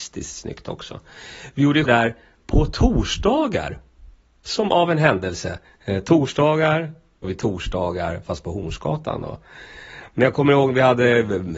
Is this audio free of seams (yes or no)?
no